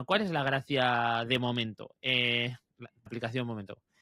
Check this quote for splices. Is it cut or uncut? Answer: cut